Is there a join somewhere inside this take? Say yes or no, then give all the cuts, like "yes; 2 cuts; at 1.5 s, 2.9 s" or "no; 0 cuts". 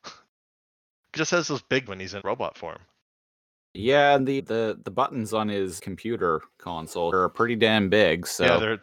yes; 6 cuts; at 1.2 s, 1.9 s, 2.2 s, 4.4 s, 5.8 s, 7.1 s